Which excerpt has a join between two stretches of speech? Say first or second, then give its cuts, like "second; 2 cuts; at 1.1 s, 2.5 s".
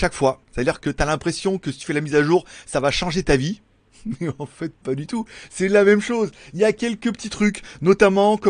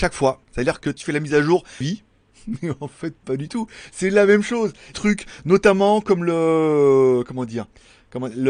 second; 3 cuts; at 1.0 s, 1.8 s, 4.9 s